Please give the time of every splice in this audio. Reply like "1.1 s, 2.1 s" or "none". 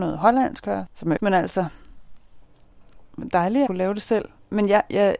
1.2 s, 3.7 s